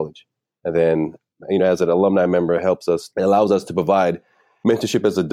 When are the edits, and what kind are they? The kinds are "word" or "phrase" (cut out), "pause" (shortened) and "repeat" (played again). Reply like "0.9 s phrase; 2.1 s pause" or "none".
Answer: none